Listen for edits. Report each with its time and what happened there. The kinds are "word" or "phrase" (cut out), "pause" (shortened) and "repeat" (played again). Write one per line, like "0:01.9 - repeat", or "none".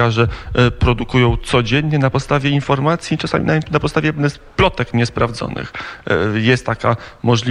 none